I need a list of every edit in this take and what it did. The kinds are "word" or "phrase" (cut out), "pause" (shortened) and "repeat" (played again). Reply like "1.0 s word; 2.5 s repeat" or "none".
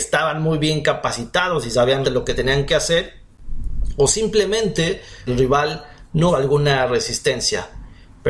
2.0 s word; 5.3 s word; 6.3 s word